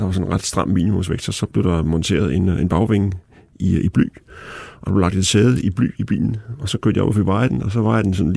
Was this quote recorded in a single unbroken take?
yes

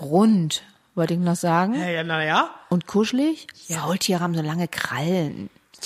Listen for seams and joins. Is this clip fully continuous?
yes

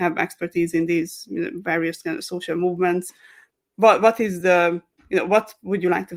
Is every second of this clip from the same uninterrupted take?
yes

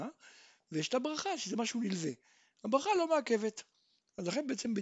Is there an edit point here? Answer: no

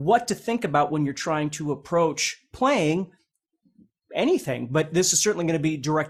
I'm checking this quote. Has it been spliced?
no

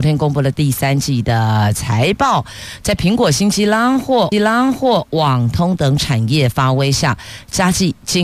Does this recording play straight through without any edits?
no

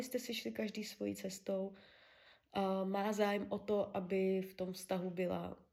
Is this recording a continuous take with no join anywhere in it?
yes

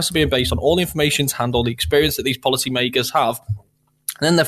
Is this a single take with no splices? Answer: yes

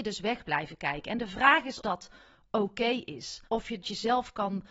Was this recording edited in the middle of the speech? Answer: yes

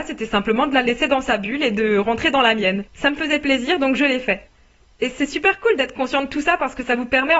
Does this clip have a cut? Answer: no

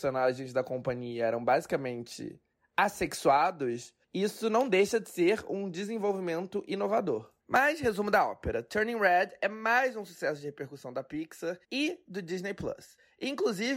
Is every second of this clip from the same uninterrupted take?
no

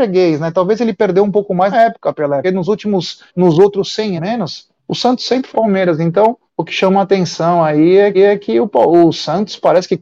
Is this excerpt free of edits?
no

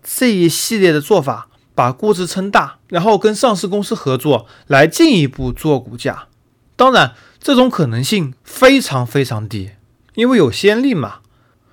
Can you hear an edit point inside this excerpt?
yes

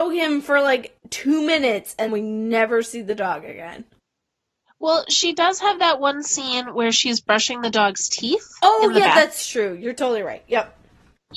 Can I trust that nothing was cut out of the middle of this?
no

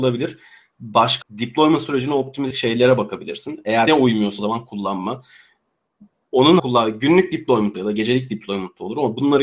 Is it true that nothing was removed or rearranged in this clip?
no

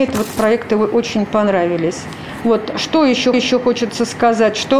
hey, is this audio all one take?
no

